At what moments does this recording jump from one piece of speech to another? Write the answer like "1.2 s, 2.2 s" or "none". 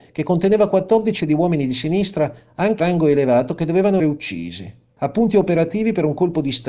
1.2 s, 2.8 s, 4.0 s, 5.0 s